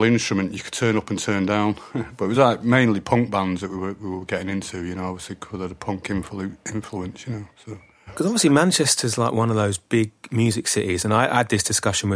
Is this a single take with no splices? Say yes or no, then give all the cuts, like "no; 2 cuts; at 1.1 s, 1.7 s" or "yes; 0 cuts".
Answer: yes; 0 cuts